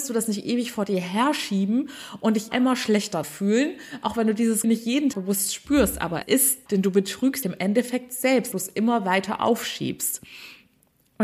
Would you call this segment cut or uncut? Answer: cut